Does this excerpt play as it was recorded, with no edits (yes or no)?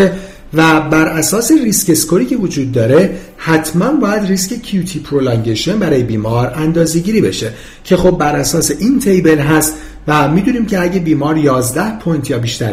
yes